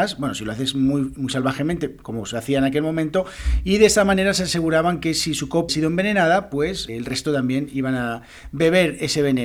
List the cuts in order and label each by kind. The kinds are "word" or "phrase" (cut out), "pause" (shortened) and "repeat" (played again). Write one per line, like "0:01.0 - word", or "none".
0:05.7 - word
0:06.9 - word